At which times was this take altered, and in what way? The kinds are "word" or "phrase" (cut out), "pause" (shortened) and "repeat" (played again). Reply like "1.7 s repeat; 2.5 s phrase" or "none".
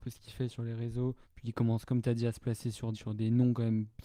1.2 s pause; 2.9 s word